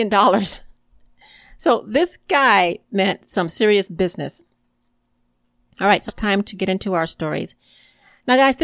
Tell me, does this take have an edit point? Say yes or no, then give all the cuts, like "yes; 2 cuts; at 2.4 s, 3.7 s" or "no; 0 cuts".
yes; 1 cut; at 6.1 s